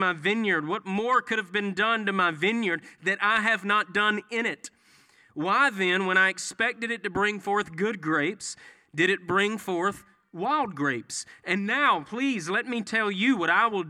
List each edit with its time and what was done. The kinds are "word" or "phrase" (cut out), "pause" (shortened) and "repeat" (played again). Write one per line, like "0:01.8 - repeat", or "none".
none

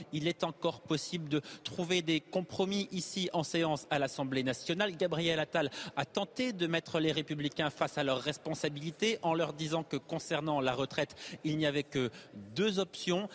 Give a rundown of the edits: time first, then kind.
none

